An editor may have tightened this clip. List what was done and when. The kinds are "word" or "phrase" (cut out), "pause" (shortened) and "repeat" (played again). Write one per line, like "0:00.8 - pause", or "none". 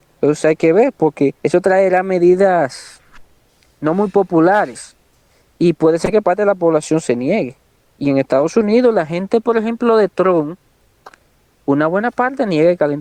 0:01.4 - pause